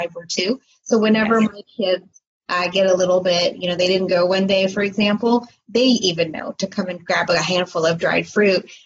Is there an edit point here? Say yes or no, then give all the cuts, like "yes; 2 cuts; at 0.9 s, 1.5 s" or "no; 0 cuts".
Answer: no; 0 cuts